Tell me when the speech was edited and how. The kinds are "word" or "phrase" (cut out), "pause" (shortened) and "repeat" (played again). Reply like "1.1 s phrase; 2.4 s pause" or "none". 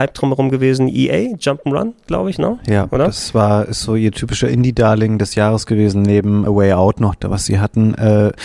6.5 s word